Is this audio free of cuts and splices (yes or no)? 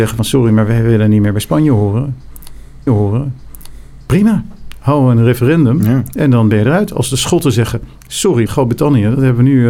no